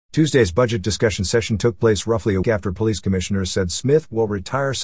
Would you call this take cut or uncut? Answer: cut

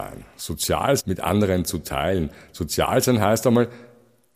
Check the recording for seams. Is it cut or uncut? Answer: cut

